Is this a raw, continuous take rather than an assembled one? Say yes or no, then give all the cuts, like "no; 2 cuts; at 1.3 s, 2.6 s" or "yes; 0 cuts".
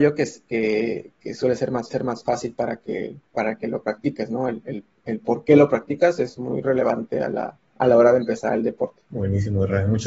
no; 4 cuts; at 1.9 s, 3.3 s, 7.7 s, 9.1 s